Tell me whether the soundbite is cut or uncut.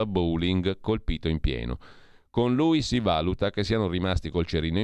uncut